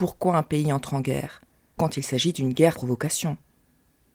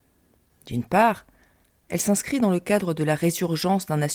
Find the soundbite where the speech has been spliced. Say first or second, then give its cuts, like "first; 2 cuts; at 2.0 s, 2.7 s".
first; 2 cuts; at 1.8 s, 2.7 s